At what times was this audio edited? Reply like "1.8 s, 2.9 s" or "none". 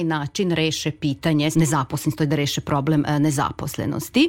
1.5 s